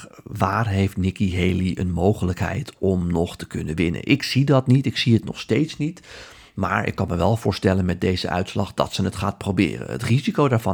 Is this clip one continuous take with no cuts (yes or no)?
yes